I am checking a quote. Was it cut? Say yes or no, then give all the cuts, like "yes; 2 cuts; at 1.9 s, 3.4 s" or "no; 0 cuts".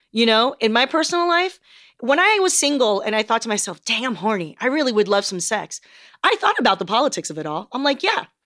no; 0 cuts